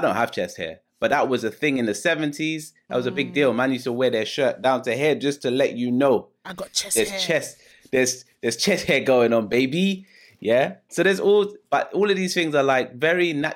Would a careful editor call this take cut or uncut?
uncut